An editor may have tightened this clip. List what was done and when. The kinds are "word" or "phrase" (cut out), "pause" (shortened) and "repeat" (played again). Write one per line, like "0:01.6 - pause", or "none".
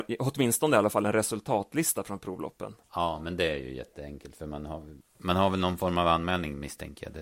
0:02.8 - pause
0:05.0 - word

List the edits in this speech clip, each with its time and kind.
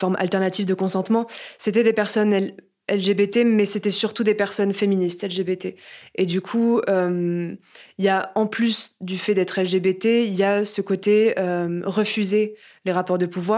none

